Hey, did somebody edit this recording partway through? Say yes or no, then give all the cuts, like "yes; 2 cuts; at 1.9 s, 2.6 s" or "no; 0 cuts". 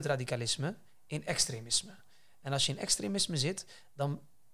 no; 0 cuts